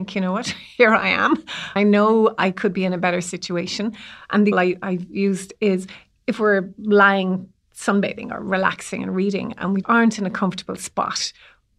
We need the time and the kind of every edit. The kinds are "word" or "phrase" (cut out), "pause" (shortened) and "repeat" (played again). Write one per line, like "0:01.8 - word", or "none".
0:01.8 - word
0:04.5 - word
0:09.8 - word

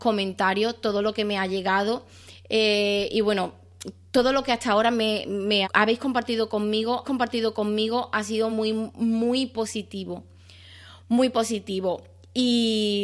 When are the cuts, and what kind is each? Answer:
0:05.6 - phrase
0:07.0 - repeat
0:08.5 - word

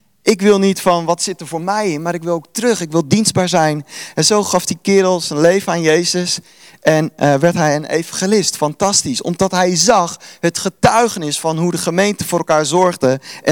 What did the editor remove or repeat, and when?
none

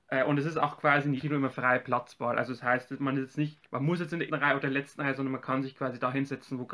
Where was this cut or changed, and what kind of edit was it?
0:01.2 - word
0:03.6 - word
0:04.3 - word

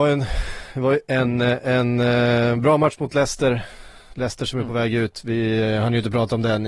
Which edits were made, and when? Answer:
none

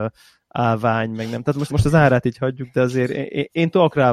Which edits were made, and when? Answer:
0:01.7 - word

